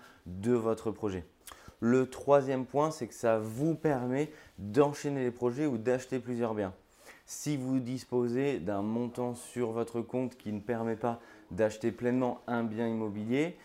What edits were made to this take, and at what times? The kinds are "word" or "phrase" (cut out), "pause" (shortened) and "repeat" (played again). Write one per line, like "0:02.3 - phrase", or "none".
none